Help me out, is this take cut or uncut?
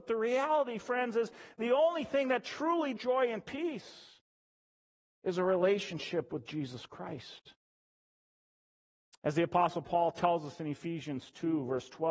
cut